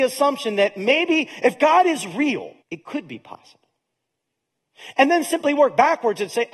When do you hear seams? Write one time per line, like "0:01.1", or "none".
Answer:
0:02.6